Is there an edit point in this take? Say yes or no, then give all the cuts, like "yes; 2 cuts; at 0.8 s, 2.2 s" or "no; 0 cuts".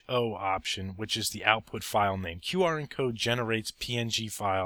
no; 0 cuts